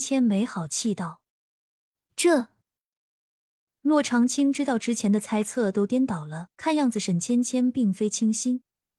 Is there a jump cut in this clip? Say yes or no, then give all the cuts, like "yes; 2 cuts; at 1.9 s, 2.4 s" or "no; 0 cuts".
yes; 2 cuts; at 1.3 s, 6.5 s